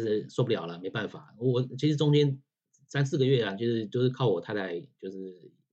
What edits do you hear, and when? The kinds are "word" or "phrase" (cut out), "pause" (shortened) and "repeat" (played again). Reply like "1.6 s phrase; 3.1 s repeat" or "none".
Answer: none